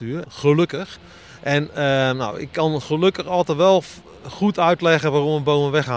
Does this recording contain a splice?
no; 0 cuts

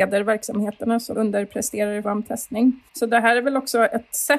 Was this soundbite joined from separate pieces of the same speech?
yes; 3 cuts; at 1.1 s, 2.0 s, 2.9 s

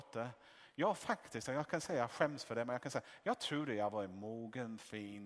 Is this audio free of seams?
yes; 0 cuts

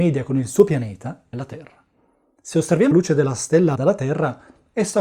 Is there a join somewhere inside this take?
yes; 3 cuts; at 1.3 s, 2.9 s, 3.7 s

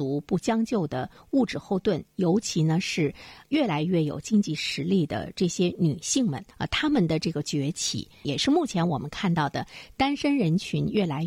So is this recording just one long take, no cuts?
no; 1 cut; at 6.5 s

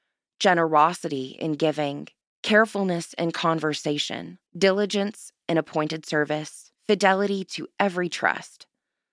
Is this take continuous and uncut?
no; 3 cuts; at 2.2 s, 4.5 s, 6.8 s

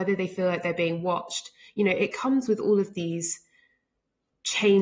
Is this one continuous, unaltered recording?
yes; 0 cuts

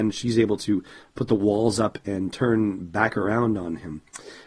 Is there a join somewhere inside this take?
no; 0 cuts

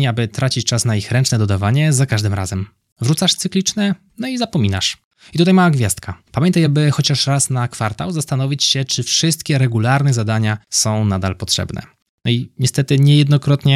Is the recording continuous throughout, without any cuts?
yes; 0 cuts

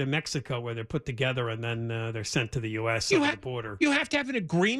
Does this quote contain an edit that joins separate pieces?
no; 0 cuts

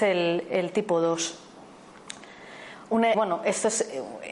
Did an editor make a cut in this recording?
yes; 1 cut; at 3.1 s

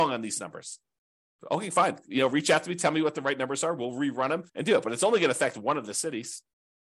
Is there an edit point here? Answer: yes; 1 cut; at 4.5 s

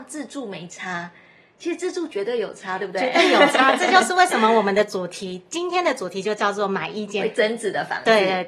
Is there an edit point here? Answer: no; 0 cuts

